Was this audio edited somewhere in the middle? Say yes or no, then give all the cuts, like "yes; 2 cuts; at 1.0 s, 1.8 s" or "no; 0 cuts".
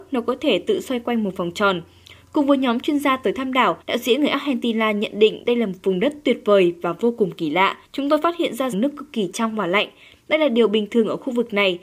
yes; 3 cuts; at 3.8 s, 7.8 s, 8.7 s